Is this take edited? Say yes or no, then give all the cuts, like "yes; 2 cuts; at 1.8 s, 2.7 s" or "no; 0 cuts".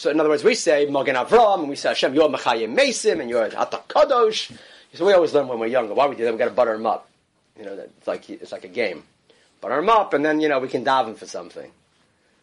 no; 0 cuts